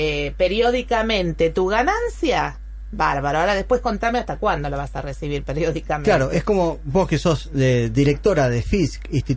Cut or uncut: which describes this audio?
uncut